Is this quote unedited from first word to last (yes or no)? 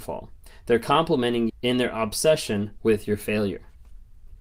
no